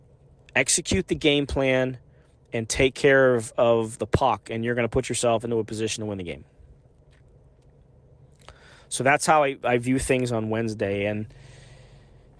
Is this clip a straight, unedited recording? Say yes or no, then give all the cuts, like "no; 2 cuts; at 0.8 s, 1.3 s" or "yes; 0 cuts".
yes; 0 cuts